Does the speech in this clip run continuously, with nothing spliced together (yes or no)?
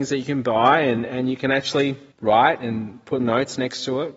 no